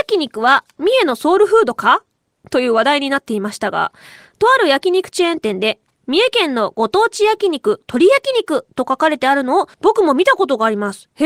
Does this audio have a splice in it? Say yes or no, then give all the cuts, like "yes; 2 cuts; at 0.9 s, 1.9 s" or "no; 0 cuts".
yes; 1 cut; at 9.7 s